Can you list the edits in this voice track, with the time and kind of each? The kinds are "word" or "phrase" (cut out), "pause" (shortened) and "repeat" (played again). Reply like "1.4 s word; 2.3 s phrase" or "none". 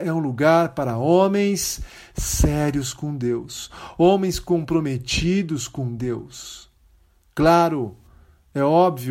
none